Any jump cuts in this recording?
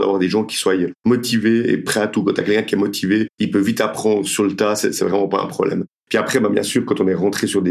no; 0 cuts

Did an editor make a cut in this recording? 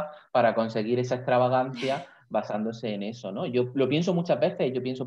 no; 0 cuts

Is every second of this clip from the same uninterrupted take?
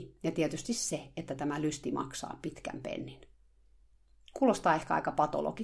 yes; 0 cuts

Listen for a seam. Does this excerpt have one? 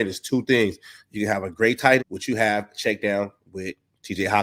yes; 1 cut; at 2.0 s

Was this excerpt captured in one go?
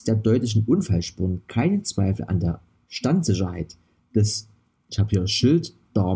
yes; 0 cuts

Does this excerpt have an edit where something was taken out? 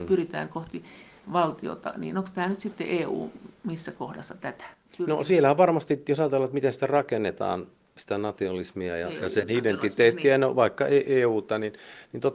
no; 0 cuts

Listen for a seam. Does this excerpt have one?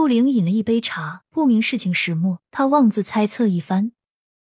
yes; 2 cuts; at 1.3 s, 2.5 s

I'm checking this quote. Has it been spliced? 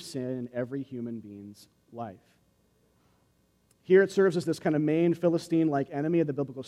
no; 0 cuts

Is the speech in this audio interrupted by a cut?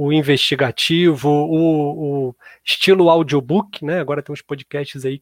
no; 0 cuts

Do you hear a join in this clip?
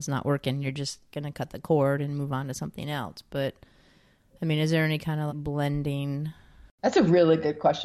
yes; 1 cut; at 5.3 s

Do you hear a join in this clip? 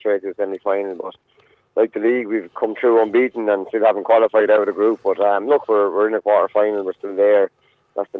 no; 0 cuts

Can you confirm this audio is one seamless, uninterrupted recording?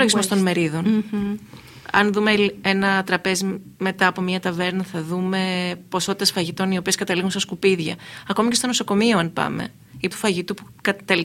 no; 2 cuts; at 3.7 s, 10.1 s

